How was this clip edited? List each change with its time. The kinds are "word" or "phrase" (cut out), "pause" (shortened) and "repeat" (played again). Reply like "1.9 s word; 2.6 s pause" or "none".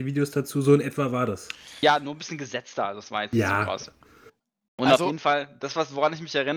none